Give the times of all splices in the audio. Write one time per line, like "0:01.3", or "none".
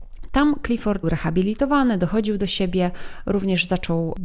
0:01.0